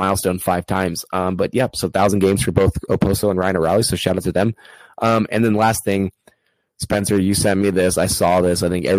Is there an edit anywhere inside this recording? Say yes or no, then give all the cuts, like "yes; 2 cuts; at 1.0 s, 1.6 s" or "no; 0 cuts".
no; 0 cuts